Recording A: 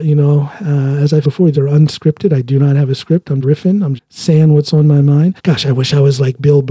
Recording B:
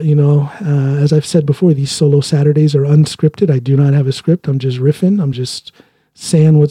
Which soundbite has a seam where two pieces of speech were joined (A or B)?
A